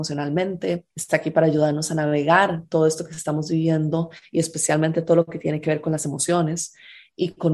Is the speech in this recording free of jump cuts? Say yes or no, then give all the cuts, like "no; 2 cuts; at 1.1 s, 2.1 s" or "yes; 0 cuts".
no; 1 cut; at 0.9 s